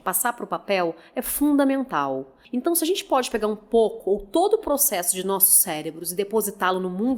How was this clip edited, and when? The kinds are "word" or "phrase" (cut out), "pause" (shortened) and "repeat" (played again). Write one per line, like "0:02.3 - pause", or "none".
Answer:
0:02.4 - pause